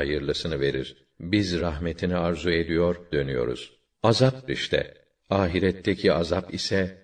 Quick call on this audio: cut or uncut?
cut